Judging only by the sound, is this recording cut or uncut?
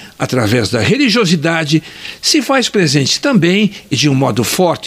uncut